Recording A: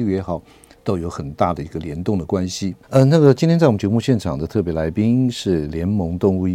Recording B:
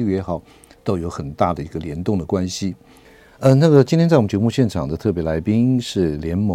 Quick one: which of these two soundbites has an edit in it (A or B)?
A